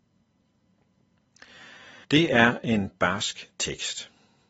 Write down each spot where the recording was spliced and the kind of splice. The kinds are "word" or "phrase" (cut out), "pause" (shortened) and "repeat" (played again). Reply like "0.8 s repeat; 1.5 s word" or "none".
2.0 s pause